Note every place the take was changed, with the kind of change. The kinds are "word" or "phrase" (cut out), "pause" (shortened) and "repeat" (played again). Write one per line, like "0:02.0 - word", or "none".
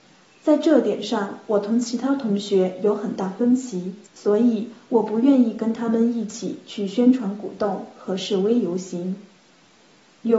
0:04.1 - pause